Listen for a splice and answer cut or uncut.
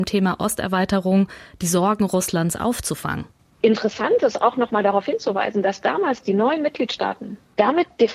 uncut